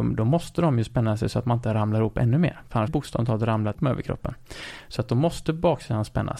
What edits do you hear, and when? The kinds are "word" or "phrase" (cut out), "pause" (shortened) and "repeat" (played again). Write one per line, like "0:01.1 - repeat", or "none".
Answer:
0:02.9 - phrase
0:03.7 - word